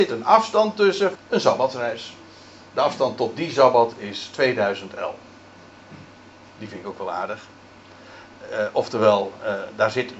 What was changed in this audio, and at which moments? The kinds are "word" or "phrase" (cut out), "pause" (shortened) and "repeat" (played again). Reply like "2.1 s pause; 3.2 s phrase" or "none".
1.1 s word